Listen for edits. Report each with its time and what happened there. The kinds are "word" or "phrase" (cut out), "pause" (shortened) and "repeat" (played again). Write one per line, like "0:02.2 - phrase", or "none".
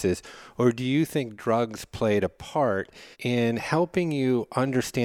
0:03.1 - pause